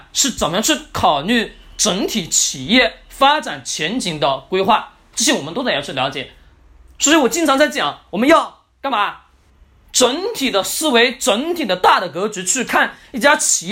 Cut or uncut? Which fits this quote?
uncut